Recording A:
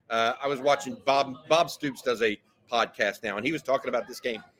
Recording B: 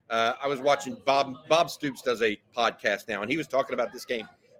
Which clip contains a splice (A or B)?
B